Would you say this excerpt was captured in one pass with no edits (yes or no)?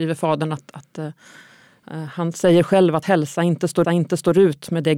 no